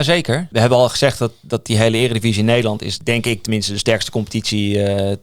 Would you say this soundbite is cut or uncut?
uncut